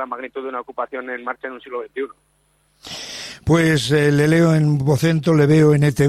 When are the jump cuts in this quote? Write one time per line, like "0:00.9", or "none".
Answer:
none